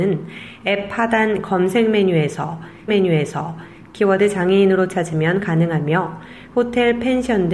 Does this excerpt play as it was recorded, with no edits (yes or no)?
no